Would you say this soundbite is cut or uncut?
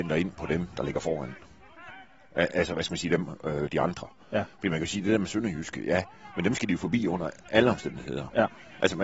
uncut